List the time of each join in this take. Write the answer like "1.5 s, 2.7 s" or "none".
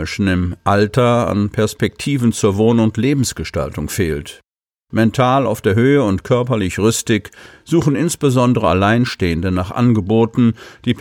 none